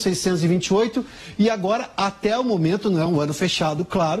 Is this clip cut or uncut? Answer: uncut